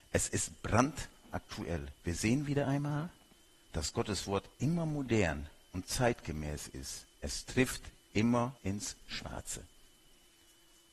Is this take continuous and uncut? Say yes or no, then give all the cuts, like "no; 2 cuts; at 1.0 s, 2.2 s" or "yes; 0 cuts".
no; 5 cuts; at 2.0 s, 3.3 s, 4.5 s, 7.1 s, 8.6 s